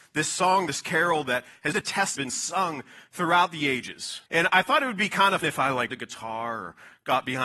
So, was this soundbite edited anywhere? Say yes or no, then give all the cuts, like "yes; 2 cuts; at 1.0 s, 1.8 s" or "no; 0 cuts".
yes; 5 cuts; at 1.7 s, 2.2 s, 4.3 s, 5.4 s, 5.9 s